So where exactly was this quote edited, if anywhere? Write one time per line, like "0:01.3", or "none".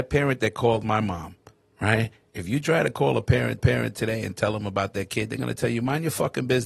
0:03.6